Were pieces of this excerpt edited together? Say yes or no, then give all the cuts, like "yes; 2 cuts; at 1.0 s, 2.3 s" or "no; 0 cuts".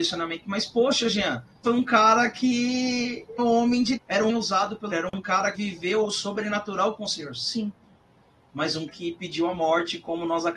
yes; 8 cuts; at 1.6 s, 3.4 s, 4.0 s, 4.3 s, 4.9 s, 5.5 s, 6.0 s, 8.9 s